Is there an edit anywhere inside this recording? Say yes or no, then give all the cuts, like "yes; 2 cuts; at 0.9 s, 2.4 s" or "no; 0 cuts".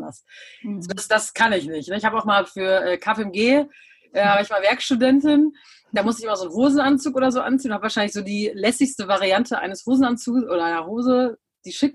no; 0 cuts